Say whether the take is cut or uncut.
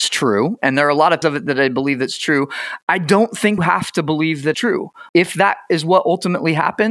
cut